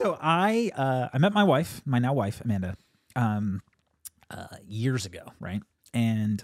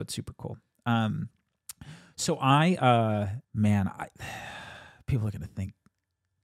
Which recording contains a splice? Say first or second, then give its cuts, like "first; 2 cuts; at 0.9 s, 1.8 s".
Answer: second; 1 cut; at 3.4 s